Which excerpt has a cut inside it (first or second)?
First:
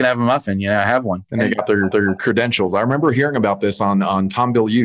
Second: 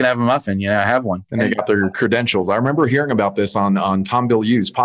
first